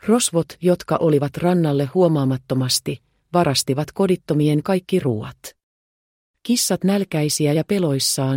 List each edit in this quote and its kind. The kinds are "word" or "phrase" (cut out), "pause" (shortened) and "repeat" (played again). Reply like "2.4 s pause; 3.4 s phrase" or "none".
1.3 s word; 4.6 s word; 6.8 s word